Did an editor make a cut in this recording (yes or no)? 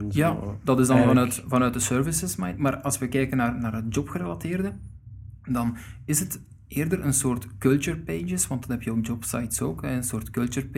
no